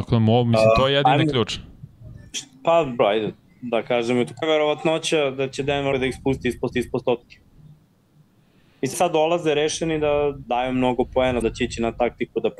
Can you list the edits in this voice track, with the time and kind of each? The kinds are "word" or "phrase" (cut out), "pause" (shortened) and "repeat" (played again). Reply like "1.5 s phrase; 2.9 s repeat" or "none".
3.0 s word; 4.4 s word; 5.9 s word; 6.7 s repeat; 8.9 s word; 10.4 s word; 11.4 s word